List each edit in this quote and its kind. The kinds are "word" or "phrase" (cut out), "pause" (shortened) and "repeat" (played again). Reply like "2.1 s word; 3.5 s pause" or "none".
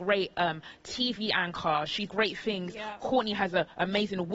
2.1 s word